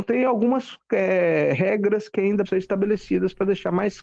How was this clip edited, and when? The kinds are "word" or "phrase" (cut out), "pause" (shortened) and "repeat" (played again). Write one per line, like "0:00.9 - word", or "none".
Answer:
0:02.4 - word